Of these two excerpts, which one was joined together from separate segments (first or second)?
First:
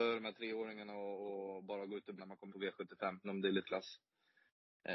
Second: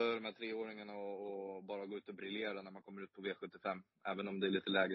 first